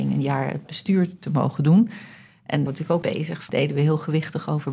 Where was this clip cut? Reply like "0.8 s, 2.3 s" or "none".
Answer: 2.7 s, 3.0 s, 3.5 s